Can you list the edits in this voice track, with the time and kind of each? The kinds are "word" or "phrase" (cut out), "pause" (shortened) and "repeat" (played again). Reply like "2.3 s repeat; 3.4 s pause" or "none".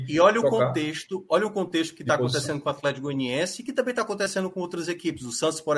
none

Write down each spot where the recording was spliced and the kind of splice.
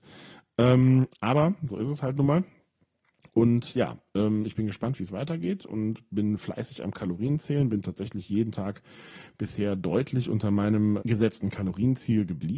11.0 s word

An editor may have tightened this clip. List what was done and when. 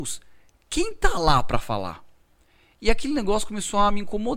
none

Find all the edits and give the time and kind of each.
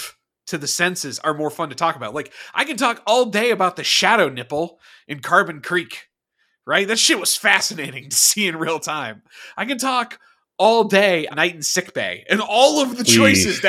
11.3 s word

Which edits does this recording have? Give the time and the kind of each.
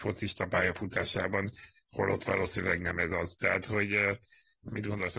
none

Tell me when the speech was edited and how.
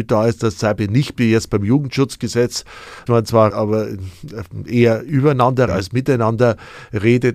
1.2 s word; 3.1 s word; 3.5 s word; 5.7 s word

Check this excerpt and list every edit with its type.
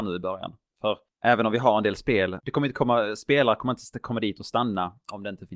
2.4 s word

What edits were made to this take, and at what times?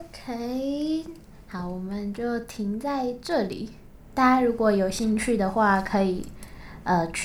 none

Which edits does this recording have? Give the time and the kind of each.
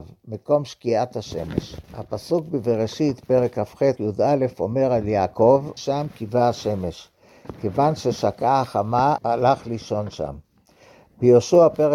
1.8 s pause; 4.0 s word; 5.8 s word; 9.2 s word

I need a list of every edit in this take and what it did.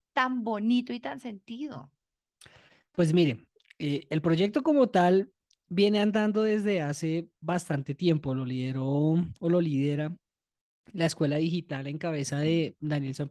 none

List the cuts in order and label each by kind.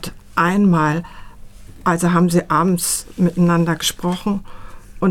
none

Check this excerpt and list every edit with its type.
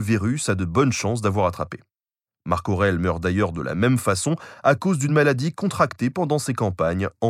none

